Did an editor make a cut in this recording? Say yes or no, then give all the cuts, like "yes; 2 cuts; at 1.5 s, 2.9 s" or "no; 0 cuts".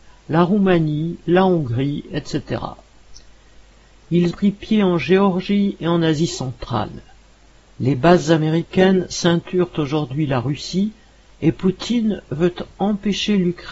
yes; 1 cut; at 4.3 s